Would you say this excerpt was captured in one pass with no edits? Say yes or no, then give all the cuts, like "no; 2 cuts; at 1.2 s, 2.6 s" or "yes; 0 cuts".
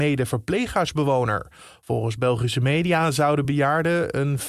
yes; 0 cuts